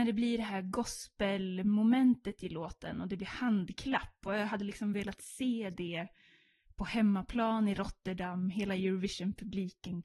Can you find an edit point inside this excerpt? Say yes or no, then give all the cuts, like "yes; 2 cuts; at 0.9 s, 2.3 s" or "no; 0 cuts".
no; 0 cuts